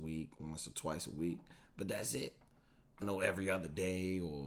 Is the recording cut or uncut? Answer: cut